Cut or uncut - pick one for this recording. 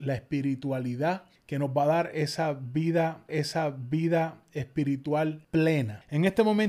cut